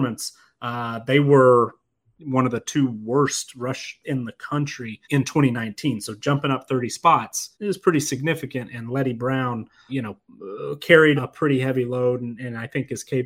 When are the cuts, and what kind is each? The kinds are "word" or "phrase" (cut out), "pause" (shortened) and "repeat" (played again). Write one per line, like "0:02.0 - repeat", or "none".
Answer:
0:04.0 - word
0:05.0 - pause
0:07.5 - pause
0:09.9 - word
0:11.2 - word